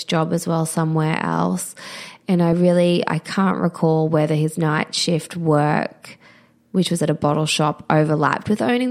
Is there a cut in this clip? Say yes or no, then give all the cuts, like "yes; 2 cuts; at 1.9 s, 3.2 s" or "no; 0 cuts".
no; 0 cuts